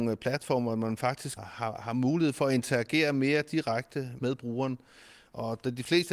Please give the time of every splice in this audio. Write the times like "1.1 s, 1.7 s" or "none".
1.4 s